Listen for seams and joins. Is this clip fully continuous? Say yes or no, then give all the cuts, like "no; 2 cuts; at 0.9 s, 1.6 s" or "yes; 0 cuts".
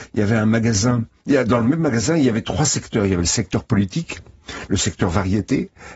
yes; 0 cuts